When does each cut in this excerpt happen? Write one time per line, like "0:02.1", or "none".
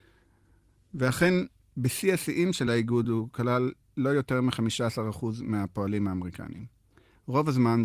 none